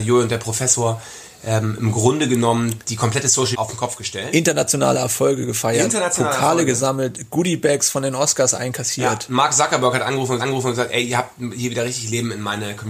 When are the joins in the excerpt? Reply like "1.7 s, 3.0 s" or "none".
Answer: 3.5 s, 10.4 s

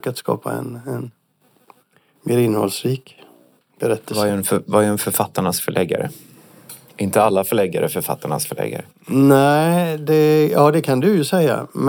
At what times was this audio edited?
none

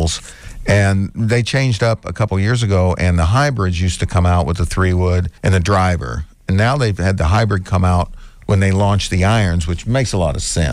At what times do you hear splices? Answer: 5.4 s

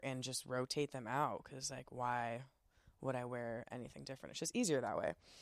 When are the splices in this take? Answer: none

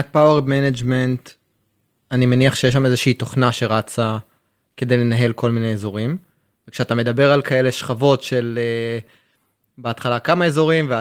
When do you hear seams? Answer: none

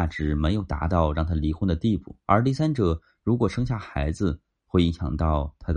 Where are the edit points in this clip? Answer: 2.2 s

